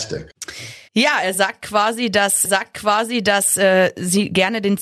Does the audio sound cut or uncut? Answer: cut